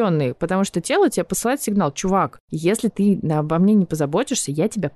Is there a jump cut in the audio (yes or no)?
no